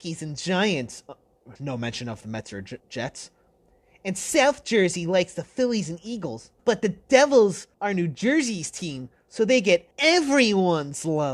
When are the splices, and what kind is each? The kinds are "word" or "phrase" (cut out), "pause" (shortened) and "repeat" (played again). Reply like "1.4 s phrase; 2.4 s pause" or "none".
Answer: 1.6 s pause; 2.8 s pause; 6.6 s pause; 7.7 s pause; 9.9 s pause